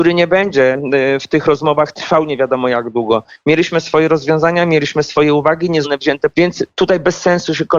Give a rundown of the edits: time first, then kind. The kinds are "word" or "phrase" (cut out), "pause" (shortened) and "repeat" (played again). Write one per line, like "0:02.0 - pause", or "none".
0:05.8 - word
0:06.3 - phrase